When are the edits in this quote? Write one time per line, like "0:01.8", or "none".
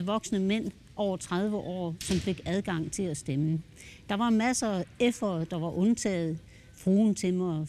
none